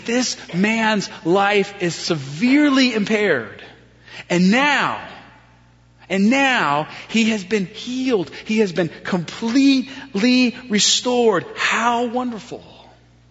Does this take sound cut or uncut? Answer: uncut